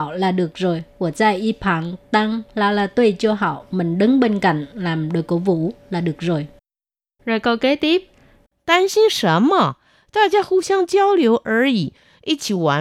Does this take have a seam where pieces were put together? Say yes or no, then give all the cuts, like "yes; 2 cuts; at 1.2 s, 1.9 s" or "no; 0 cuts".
no; 0 cuts